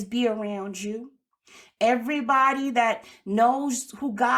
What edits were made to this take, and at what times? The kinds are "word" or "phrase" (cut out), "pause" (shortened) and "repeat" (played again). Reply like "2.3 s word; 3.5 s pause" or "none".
none